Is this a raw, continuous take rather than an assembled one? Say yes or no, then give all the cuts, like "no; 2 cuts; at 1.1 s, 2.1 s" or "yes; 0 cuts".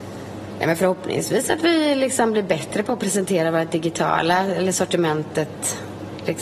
yes; 0 cuts